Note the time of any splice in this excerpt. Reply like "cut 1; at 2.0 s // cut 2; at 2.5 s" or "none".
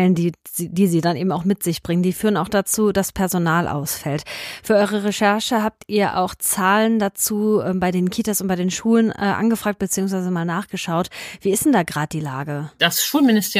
none